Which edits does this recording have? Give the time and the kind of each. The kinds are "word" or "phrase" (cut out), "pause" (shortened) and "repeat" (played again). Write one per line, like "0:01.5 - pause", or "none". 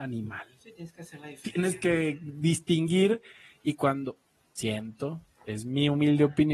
none